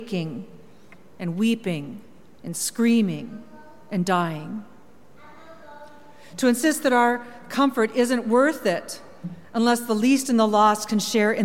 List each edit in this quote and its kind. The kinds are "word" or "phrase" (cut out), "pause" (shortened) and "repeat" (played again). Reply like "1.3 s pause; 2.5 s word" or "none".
none